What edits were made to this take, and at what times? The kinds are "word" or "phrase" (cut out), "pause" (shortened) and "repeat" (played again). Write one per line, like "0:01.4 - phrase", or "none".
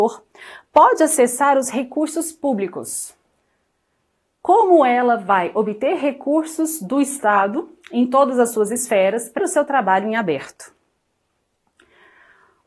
0:09.4 - word